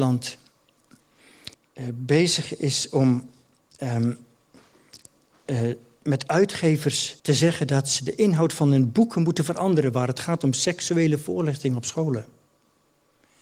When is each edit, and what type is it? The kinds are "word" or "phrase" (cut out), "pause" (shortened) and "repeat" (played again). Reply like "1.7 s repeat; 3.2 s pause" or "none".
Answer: 1.5 s pause; 7.2 s pause